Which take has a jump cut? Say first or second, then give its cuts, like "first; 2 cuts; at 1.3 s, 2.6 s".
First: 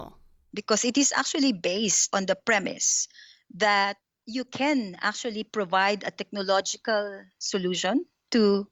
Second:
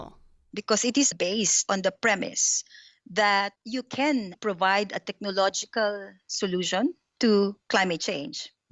second; 3 cuts; at 1.1 s, 3.6 s, 4.3 s